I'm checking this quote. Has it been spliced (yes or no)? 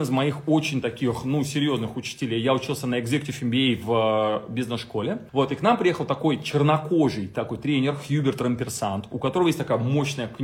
yes